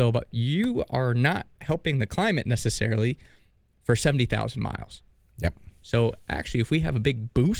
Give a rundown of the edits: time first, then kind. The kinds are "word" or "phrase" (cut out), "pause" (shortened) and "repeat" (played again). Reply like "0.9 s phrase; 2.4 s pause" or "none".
none